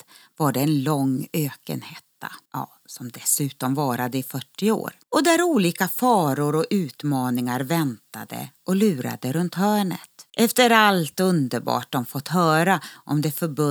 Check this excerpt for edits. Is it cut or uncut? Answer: cut